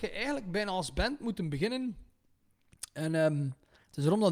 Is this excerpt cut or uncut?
uncut